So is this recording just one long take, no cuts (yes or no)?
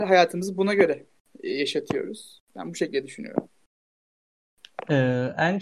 yes